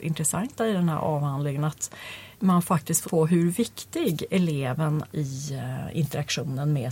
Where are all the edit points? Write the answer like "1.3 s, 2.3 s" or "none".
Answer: 2.3 s, 3.0 s, 5.1 s